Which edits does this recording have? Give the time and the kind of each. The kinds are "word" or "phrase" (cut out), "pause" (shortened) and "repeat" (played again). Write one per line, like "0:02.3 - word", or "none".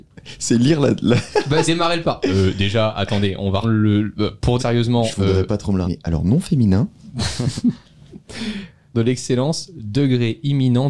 0:01.7 - word
0:02.0 - word
0:03.6 - word
0:04.6 - word
0:05.8 - word
0:08.9 - word